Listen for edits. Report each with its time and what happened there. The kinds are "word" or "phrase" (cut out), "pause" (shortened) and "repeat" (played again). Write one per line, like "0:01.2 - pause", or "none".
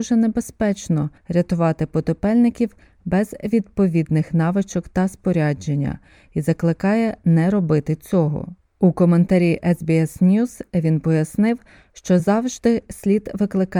none